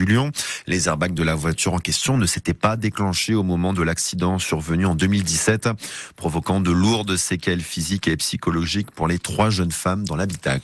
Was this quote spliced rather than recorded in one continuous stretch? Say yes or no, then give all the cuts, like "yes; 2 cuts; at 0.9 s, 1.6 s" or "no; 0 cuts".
no; 0 cuts